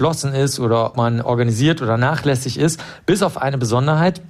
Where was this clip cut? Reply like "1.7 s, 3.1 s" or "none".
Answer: 0.9 s